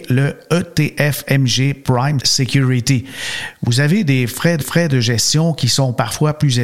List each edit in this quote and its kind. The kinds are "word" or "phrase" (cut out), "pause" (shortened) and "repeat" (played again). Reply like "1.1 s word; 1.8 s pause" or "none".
2.2 s word; 4.6 s repeat